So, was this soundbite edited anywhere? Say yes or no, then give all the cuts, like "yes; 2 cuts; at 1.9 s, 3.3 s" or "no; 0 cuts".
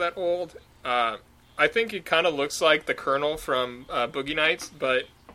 no; 0 cuts